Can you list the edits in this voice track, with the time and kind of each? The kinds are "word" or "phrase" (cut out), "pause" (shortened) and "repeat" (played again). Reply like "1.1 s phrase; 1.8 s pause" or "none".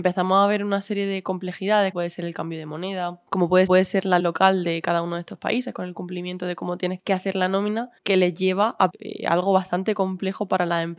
1.9 s word; 3.3 s pause; 3.7 s repeat; 4.2 s word; 7.0 s word; 8.0 s pause; 8.9 s phrase